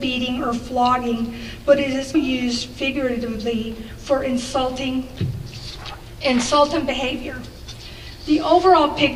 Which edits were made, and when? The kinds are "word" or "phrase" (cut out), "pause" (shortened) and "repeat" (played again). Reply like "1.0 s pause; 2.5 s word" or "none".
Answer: 2.1 s word